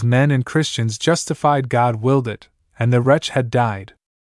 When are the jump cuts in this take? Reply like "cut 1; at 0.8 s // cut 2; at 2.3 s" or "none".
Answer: none